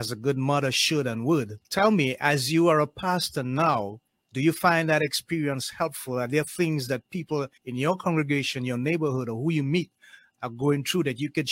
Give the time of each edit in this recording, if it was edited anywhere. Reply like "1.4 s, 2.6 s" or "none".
1.6 s, 7.6 s